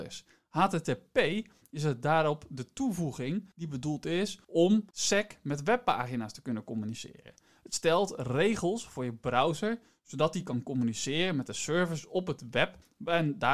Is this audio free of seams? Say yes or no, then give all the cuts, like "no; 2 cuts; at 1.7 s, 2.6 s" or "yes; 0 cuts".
yes; 0 cuts